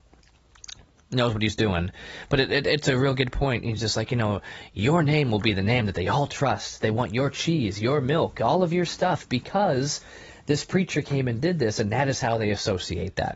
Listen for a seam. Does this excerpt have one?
no; 0 cuts

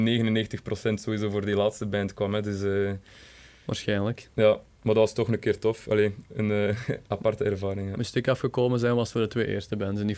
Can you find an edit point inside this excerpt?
no; 0 cuts

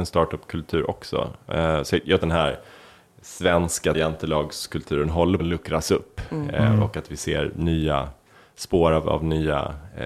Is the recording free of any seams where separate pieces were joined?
no; 3 cuts; at 2.2 s, 3.9 s, 5.4 s

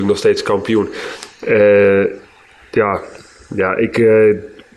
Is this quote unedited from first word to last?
yes; 0 cuts

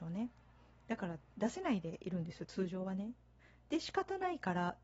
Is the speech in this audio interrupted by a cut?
yes; 1 cut; at 3.4 s

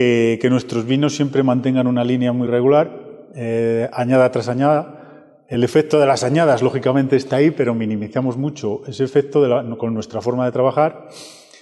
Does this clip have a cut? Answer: no; 0 cuts

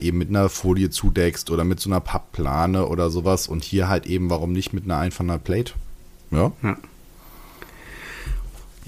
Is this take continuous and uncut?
yes; 0 cuts

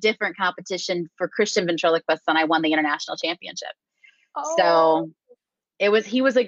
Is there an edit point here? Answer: no; 0 cuts

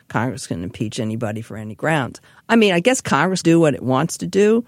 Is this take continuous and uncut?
no; 1 cut; at 3.4 s

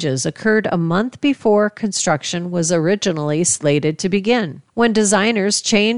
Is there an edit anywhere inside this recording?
yes; 1 cut; at 4.7 s

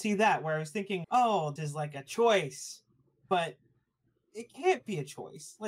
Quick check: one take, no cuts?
no; 2 cuts; at 1.0 s, 1.6 s

